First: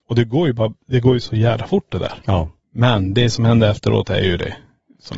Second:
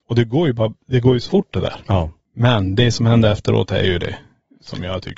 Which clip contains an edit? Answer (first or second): second